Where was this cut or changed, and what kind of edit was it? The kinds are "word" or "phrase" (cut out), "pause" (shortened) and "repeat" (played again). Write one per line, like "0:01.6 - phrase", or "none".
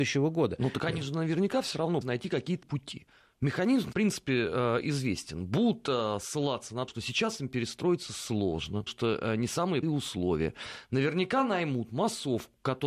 0:02.0 - word
0:02.6 - word
0:03.9 - word
0:06.9 - word
0:08.9 - word
0:09.8 - word